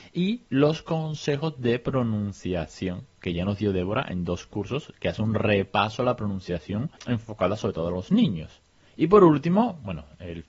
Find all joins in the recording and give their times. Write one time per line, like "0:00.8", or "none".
0:07.0
0:08.9